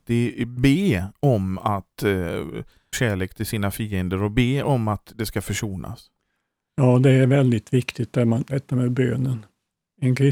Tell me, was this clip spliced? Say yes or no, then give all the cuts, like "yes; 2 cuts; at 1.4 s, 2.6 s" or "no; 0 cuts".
yes; 1 cut; at 2.9 s